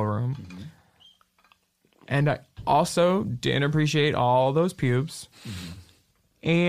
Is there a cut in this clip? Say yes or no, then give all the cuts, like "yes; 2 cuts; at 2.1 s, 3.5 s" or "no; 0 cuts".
yes; 1 cut; at 5.3 s